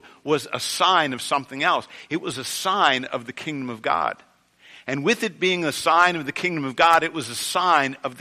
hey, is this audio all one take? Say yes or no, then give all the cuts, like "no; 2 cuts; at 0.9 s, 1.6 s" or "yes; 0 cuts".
yes; 0 cuts